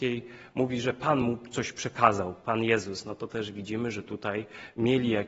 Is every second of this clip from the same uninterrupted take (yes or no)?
yes